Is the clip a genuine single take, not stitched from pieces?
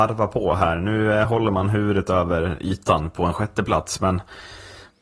yes; 0 cuts

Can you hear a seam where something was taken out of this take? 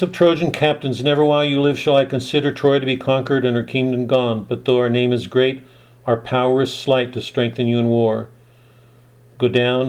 no; 0 cuts

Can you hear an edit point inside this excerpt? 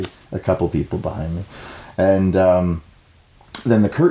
no; 0 cuts

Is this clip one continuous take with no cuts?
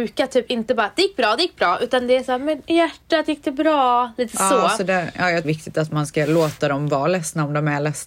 no; 1 cut; at 5.4 s

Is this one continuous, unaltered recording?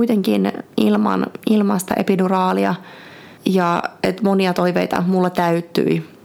no; 1 cut; at 3.4 s

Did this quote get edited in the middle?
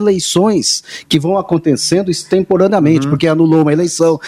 no; 0 cuts

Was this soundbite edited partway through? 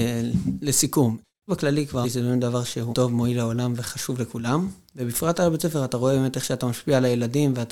yes; 3 cuts; at 1.5 s, 2.0 s, 2.9 s

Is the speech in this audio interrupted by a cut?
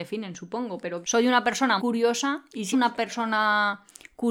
yes; 3 cuts; at 1.0 s, 1.8 s, 2.7 s

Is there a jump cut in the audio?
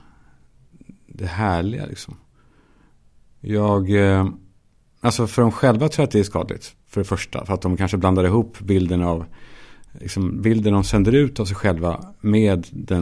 no; 0 cuts

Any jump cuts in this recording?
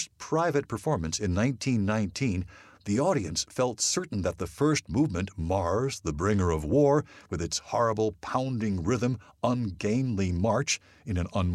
no; 0 cuts

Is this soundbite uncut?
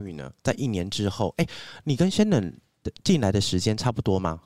yes; 0 cuts

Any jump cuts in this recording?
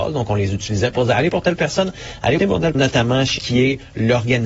yes; 4 cuts; at 1.3 s, 2.4 s, 2.7 s, 3.4 s

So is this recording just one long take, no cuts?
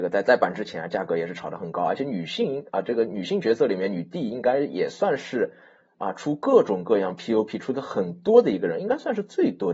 yes; 0 cuts

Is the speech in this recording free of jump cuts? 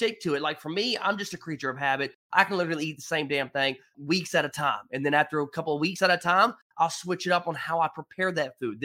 yes; 0 cuts

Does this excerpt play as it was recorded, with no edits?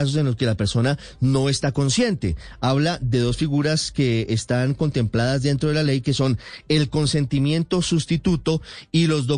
yes; 0 cuts

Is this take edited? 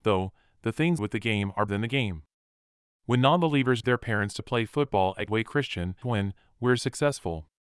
yes; 5 cuts; at 1.0 s, 1.7 s, 3.8 s, 5.3 s, 6.0 s

